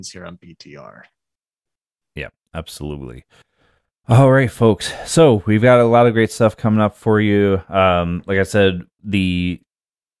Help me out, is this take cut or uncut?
cut